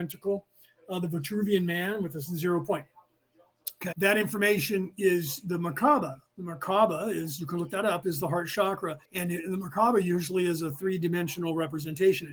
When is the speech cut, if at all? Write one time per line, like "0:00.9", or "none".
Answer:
0:03.9
0:09.0